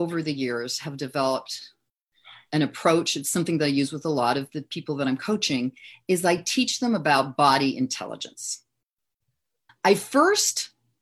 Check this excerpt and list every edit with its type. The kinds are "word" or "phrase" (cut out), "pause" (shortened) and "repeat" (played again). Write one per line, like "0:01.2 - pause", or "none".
none